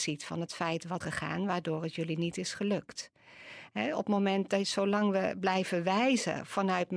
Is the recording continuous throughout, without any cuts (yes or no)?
no